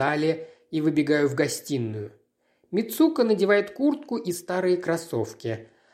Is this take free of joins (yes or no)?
yes